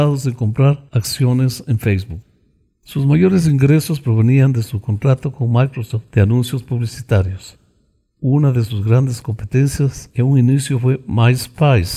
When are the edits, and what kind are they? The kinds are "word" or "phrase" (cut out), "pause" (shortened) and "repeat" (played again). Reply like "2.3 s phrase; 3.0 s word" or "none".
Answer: none